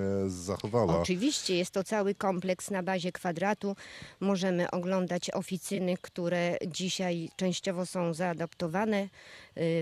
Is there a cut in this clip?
no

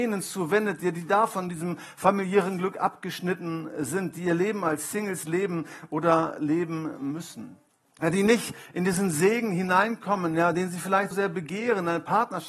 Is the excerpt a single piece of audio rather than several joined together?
no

